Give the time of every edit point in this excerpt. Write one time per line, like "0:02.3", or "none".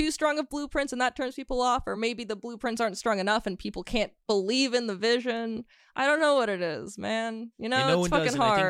none